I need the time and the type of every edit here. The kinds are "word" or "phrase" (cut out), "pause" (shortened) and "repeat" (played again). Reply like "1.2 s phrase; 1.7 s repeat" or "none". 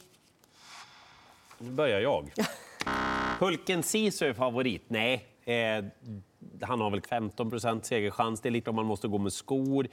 5.3 s pause; 7.0 s word; 8.6 s word